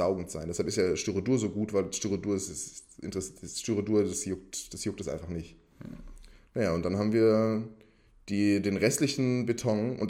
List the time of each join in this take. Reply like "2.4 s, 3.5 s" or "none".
none